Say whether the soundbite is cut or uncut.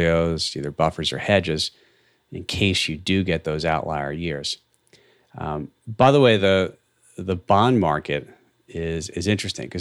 uncut